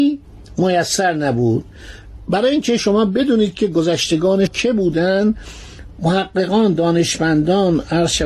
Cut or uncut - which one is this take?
cut